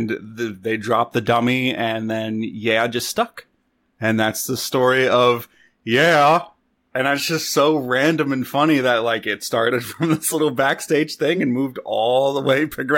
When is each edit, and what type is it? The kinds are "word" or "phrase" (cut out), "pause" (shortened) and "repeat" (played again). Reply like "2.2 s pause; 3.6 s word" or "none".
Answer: none